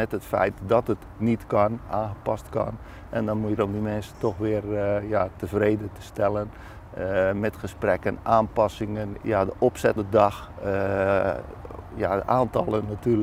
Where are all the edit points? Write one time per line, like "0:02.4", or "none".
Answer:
0:03.6
0:09.2
0:10.0